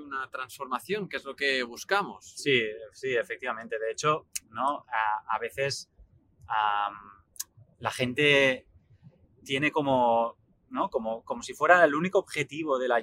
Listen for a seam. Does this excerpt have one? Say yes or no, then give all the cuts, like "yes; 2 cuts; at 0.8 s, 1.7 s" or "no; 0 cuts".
no; 0 cuts